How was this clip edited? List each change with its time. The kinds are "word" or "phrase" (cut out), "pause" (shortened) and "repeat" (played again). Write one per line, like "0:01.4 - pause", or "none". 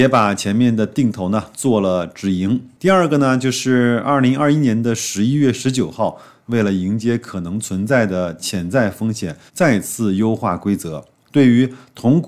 0:06.4 - phrase
0:09.5 - pause

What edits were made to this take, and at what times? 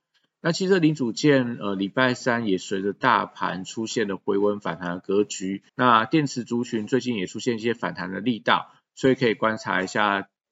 0:05.7 - pause

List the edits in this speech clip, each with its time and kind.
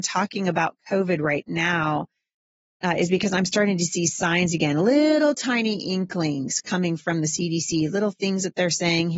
none

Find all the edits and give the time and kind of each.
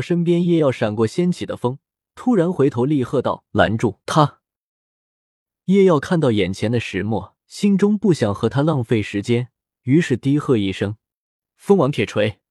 0:04.0 - pause
0:07.4 - pause
0:09.6 - pause

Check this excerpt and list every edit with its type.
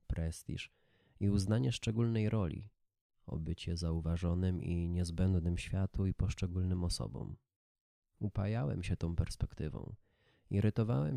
none

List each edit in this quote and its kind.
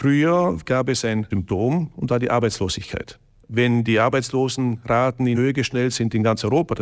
0:01.3 - word
0:02.1 - word
0:05.3 - word
0:05.9 - word

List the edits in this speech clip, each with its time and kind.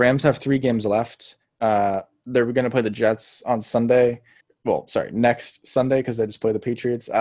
0:04.4 - pause

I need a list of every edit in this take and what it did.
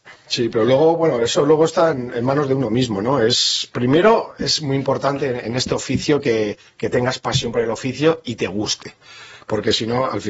none

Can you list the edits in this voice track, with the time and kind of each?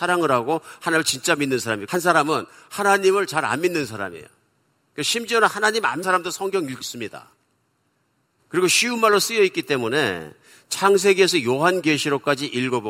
0:06.0 - word
0:06.8 - word

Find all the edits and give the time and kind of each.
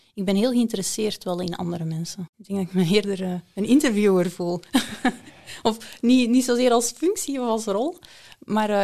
0:02.3 - pause

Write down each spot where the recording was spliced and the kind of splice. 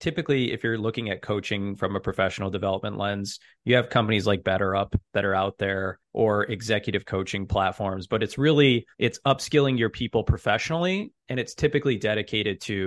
0:06.0 - pause
0:08.9 - pause

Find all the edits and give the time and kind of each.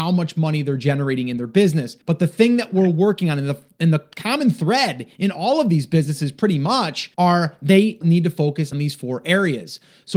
0:02.0 - pause
0:07.1 - pause
0:08.0 - word
0:08.7 - word

